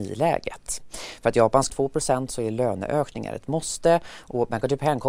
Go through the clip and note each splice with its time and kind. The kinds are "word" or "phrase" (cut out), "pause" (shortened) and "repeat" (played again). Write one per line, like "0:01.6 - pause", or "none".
0:01.7 - phrase